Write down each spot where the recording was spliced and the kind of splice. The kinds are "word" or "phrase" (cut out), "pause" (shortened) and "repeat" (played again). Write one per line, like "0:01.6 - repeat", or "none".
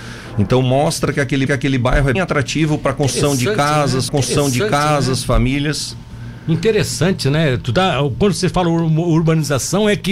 0:01.5 - repeat
0:02.1 - word
0:04.1 - repeat